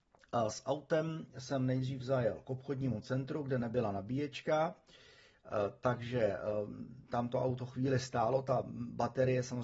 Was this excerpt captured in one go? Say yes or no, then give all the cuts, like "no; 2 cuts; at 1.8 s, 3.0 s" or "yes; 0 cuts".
yes; 0 cuts